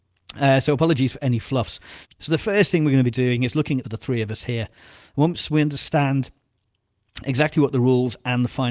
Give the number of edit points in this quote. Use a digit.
1